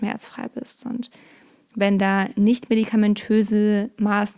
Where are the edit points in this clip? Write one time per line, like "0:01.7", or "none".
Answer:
none